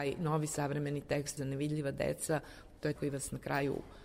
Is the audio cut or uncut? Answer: cut